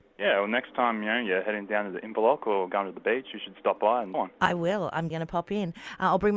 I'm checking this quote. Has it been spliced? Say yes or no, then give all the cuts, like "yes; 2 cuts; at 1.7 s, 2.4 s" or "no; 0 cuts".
yes; 2 cuts; at 4.1 s, 5.1 s